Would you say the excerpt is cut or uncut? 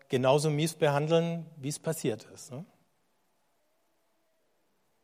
uncut